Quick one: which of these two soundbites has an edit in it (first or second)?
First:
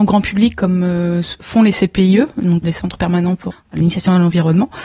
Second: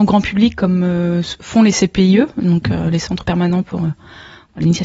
first